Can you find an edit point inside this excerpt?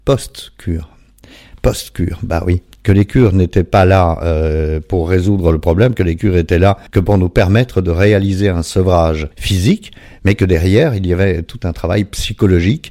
yes; 2 cuts; at 6.9 s, 9.3 s

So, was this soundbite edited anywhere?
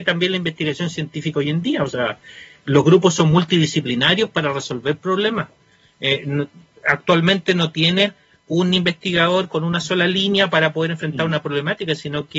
no; 0 cuts

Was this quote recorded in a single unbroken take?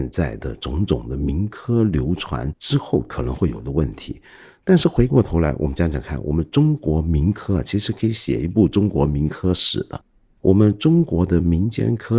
yes; 0 cuts

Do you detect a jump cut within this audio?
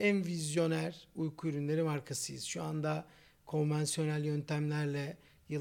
no; 0 cuts

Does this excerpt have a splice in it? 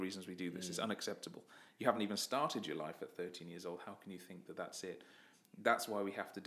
no; 0 cuts

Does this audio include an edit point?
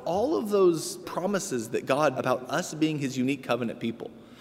yes; 2 cuts; at 1.0 s, 2.1 s

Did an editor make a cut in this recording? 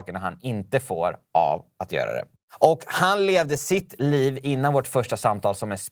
no; 0 cuts

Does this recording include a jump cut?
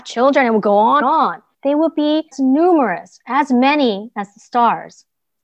yes; 3 cuts; at 1.0 s, 1.5 s, 2.3 s

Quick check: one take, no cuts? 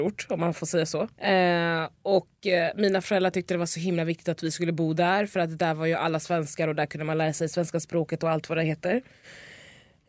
no; 1 cut; at 1.1 s

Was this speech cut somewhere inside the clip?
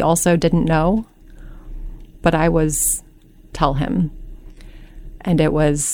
yes; 1 cut; at 3.5 s

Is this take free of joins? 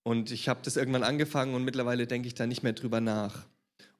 yes; 0 cuts

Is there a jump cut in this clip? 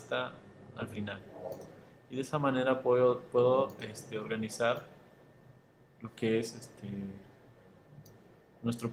no; 0 cuts

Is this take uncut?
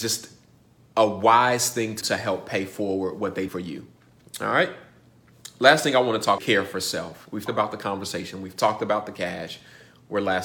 no; 4 cuts; at 2.0 s, 3.5 s, 6.4 s, 7.5 s

